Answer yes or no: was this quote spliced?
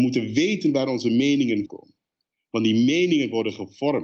yes